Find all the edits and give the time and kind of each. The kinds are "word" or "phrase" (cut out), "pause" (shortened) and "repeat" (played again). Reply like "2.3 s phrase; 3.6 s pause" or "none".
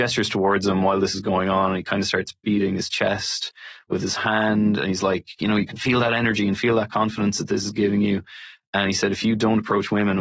none